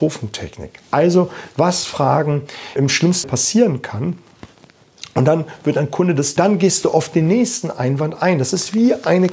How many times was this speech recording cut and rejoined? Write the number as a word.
three